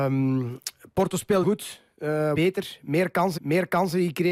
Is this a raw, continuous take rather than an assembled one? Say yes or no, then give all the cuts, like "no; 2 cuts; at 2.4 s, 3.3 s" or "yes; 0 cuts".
no; 3 cuts; at 1.4 s, 2.3 s, 3.4 s